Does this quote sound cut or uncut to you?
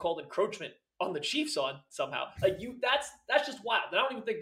uncut